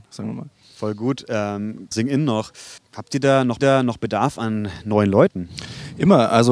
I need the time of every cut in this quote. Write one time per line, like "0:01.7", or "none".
0:01.9
0:02.8
0:03.6